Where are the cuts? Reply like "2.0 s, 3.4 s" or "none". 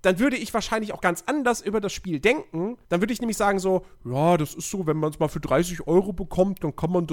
2.8 s